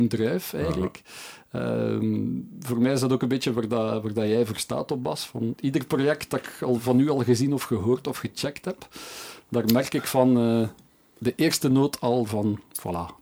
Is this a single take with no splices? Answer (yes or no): yes